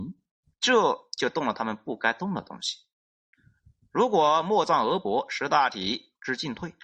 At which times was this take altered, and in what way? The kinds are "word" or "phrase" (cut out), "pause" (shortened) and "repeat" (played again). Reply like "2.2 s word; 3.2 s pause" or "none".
none

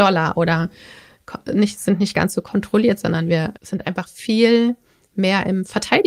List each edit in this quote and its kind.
3.6 s pause

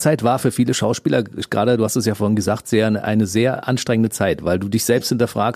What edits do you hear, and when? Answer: none

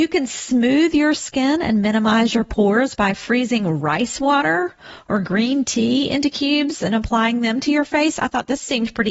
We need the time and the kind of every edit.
none

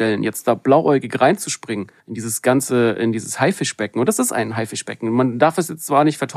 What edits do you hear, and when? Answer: 2.0 s pause

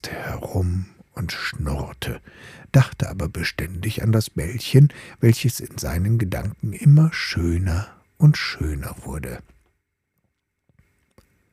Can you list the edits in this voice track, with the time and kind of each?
none

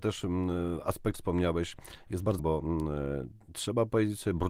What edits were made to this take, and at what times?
1.1 s phrase; 2.4 s word

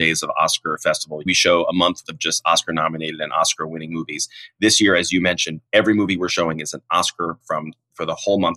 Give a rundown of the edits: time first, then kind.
1.3 s word; 2.0 s word; 5.7 s pause; 7.4 s word

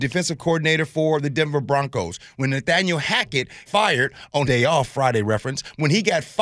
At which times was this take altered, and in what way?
3.7 s word; 4.4 s word

